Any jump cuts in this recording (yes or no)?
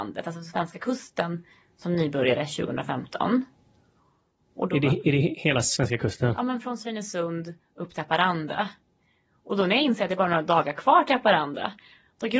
no